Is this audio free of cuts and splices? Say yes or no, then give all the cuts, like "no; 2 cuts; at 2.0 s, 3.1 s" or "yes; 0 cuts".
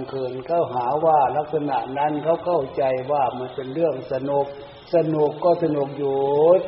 no; 1 cut; at 4.9 s